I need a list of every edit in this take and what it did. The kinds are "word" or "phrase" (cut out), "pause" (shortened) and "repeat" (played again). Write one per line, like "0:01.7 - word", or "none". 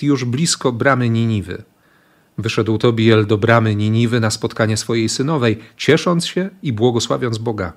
none